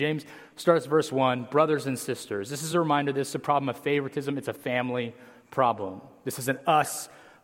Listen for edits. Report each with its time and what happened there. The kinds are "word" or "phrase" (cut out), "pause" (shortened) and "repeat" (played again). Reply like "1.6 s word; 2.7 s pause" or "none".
none